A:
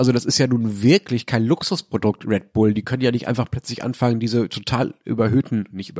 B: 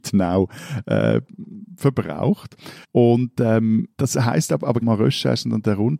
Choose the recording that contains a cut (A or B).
B